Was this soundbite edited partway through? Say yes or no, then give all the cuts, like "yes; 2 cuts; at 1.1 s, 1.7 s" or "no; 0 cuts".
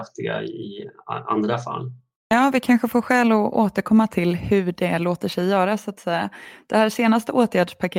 no; 0 cuts